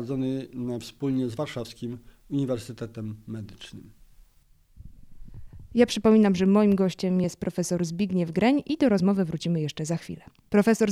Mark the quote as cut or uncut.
uncut